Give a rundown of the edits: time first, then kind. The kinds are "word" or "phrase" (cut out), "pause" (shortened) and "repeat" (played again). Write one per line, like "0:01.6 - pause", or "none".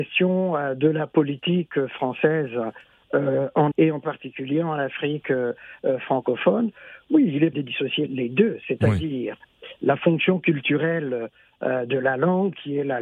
0:03.7 - word
0:07.5 - word
0:08.1 - word

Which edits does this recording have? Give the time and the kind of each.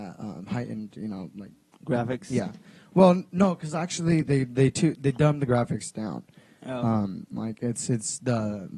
none

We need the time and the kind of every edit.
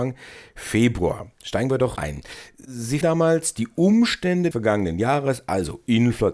0:02.0 - word
0:03.0 - word
0:04.5 - word

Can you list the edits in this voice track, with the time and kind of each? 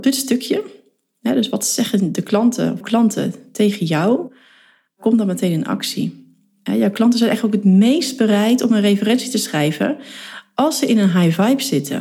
0:02.8 - word

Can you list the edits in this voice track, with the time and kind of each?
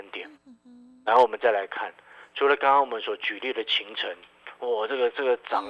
none

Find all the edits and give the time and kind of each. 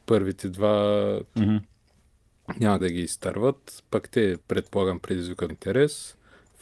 0:01.3 - pause
0:02.8 - word
0:04.4 - pause
0:05.5 - word

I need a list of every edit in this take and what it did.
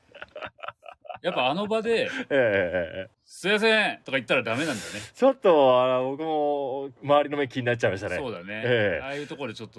0:03.1 - pause
0:07.0 - pause

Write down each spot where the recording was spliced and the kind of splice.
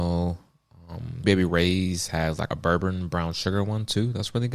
0:01.2 - word
0:02.5 - phrase

